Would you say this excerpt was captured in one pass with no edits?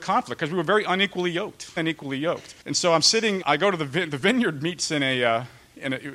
no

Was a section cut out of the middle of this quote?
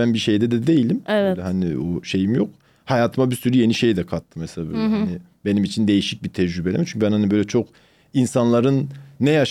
no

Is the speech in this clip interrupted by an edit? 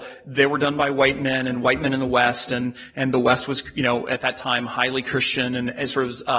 no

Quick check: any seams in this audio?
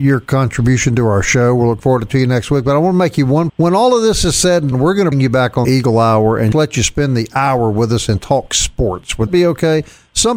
yes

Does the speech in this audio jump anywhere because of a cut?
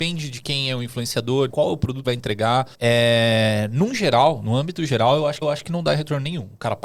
yes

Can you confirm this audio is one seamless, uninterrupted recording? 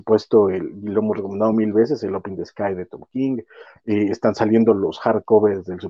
yes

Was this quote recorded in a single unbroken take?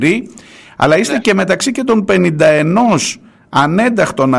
yes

